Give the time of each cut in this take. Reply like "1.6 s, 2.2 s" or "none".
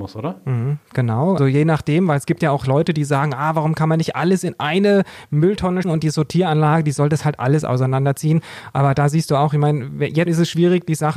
1.4 s, 5.8 s, 10.3 s